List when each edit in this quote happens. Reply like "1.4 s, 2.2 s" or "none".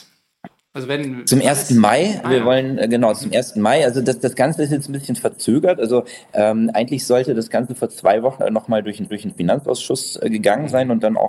2.2 s, 8.4 s, 9.1 s